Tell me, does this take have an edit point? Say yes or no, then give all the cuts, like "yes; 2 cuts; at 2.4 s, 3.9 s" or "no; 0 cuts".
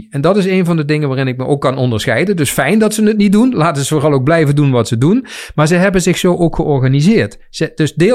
no; 0 cuts